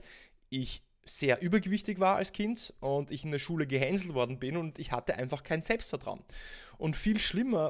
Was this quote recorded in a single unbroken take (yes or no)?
yes